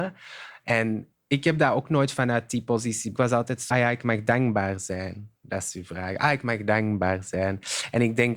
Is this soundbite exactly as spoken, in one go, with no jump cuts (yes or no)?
no